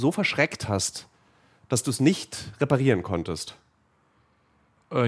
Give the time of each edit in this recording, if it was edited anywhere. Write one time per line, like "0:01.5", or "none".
none